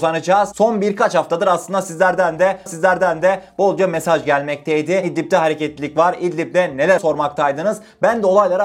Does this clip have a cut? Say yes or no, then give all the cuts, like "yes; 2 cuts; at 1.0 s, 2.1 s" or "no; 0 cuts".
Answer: yes; 2 cuts; at 2.7 s, 7.0 s